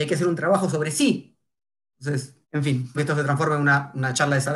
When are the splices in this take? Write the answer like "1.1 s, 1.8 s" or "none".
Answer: 2.4 s, 3.0 s